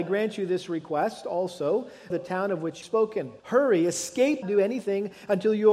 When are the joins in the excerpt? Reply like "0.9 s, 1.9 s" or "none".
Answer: 2.1 s, 2.8 s, 3.4 s, 4.4 s